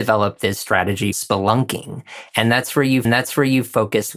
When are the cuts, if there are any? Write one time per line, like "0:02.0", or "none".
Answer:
0:01.1
0:03.0